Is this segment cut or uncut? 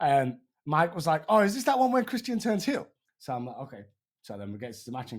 cut